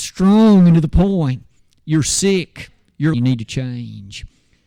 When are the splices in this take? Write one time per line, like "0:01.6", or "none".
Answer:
0:01.6
0:03.1